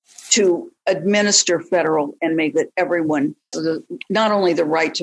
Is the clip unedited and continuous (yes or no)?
no